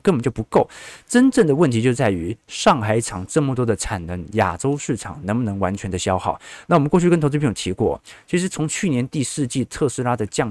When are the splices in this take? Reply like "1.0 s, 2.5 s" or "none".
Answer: none